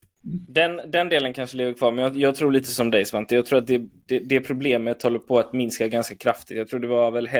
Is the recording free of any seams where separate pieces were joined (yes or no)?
yes